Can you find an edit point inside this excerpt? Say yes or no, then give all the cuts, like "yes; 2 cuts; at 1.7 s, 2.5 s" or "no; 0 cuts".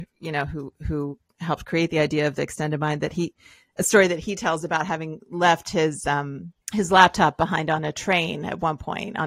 yes; 1 cut; at 6.6 s